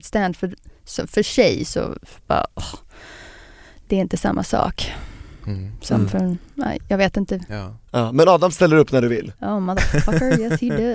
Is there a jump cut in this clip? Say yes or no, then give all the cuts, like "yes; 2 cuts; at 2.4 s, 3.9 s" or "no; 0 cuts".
no; 0 cuts